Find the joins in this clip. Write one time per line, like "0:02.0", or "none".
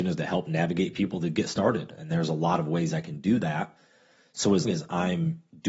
0:04.6